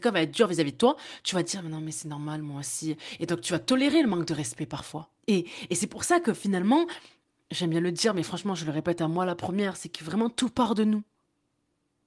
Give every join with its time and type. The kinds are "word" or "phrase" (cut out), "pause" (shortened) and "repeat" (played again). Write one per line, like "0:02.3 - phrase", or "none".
0:05.2 - pause